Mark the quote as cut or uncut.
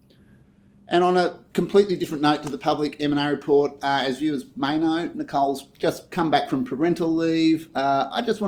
uncut